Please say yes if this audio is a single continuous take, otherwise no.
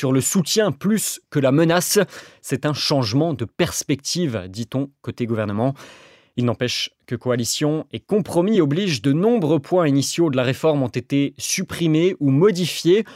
yes